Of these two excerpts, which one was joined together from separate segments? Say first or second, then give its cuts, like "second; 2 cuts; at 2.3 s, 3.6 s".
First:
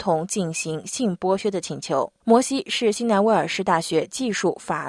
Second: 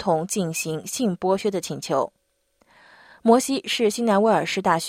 first; 1 cut; at 2.2 s